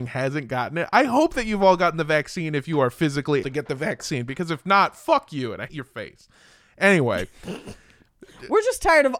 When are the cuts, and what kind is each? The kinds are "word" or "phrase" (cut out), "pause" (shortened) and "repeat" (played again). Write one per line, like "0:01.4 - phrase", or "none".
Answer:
0:03.4 - word
0:05.7 - word